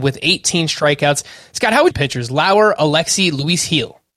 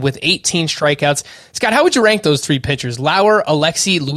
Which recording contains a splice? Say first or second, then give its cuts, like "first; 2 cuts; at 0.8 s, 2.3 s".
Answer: first; 1 cut; at 1.9 s